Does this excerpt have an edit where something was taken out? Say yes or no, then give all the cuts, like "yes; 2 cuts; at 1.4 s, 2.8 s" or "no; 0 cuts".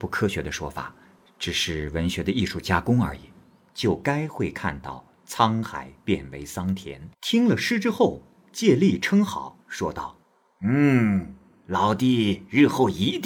yes; 3 cuts; at 7.1 s, 9.6 s, 10.2 s